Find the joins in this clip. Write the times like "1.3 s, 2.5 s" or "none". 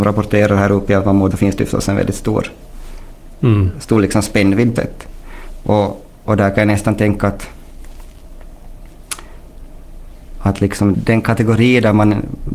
1.3 s, 4.8 s, 10.9 s